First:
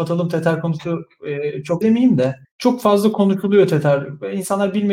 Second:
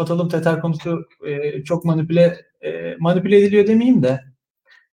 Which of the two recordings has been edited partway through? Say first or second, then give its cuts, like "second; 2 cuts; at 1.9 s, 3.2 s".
first; 2 cuts; at 1.8 s, 2.4 s